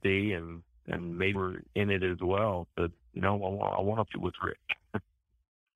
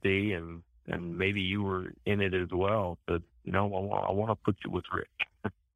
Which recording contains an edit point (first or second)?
first